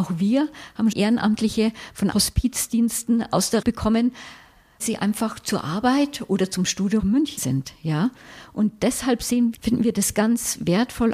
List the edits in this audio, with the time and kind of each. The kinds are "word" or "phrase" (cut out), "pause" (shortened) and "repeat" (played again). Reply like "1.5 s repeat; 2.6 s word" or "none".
0.9 s word; 2.1 s word; 3.6 s word; 4.8 s word; 7.0 s word; 7.4 s word; 9.5 s word